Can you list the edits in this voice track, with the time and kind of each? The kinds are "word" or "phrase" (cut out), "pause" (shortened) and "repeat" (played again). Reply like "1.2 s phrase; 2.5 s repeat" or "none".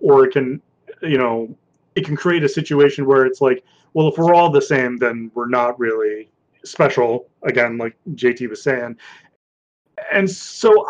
none